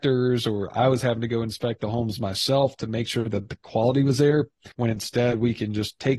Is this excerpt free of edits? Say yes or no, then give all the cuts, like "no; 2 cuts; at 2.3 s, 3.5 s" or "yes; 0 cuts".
no; 1 cut; at 4.7 s